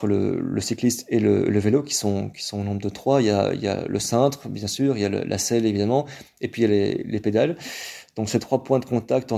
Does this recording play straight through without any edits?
yes; 0 cuts

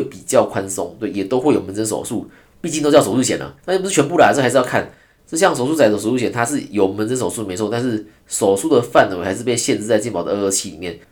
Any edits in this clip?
yes; 1 cut; at 3.6 s

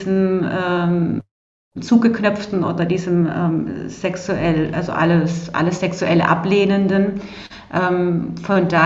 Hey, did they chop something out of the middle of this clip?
no; 0 cuts

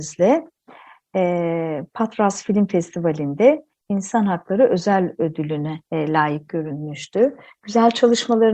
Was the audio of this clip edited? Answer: yes; 1 cut; at 5.8 s

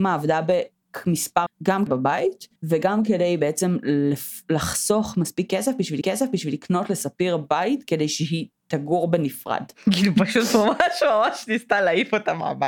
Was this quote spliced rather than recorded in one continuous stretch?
yes; 4 cuts; at 1.5 s, 1.9 s, 2.6 s, 6.0 s

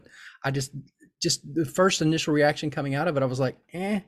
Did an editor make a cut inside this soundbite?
no; 0 cuts

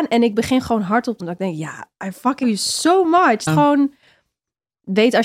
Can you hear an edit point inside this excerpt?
yes; 3 cuts; at 1.2 s, 2.4 s, 3.5 s

